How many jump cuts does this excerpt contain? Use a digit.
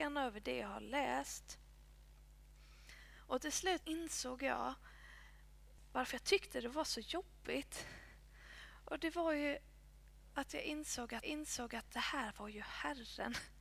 2